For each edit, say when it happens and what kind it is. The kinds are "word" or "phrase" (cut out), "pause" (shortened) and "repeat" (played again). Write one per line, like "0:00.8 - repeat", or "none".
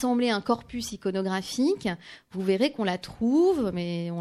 none